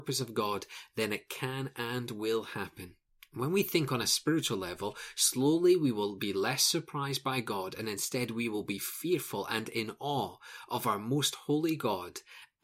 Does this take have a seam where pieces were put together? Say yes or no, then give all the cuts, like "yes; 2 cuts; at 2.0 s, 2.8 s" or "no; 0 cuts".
yes; 1 cut; at 3.1 s